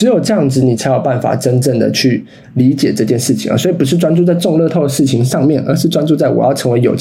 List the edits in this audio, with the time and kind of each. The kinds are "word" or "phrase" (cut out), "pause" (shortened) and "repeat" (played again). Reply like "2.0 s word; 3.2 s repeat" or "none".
none